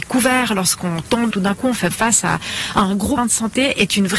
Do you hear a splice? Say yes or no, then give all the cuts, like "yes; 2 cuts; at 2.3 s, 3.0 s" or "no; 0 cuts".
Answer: yes; 3 cuts; at 1.3 s, 1.9 s, 3.2 s